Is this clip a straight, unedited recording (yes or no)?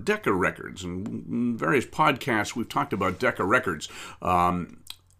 yes